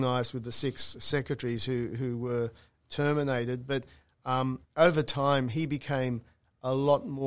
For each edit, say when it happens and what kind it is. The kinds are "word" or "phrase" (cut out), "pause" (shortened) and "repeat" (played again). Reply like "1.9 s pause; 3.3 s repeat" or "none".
4.6 s pause